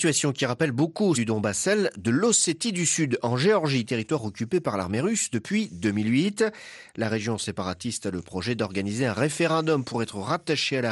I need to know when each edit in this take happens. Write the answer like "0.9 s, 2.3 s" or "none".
1.1 s